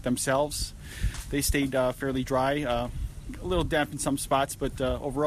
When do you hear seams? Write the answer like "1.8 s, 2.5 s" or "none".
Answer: none